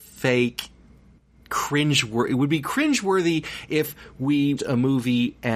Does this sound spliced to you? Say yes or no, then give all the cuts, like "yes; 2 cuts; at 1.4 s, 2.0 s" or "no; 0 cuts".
yes; 1 cut; at 4.6 s